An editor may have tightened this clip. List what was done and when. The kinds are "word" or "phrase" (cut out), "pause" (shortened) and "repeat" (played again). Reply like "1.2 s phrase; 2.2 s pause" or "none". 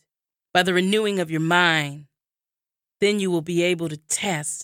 none